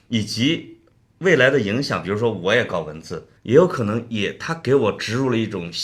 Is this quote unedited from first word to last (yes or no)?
no